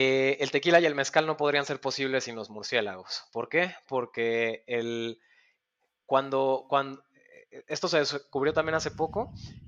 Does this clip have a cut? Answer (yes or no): no